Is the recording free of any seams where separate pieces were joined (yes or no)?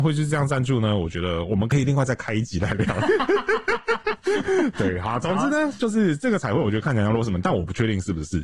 yes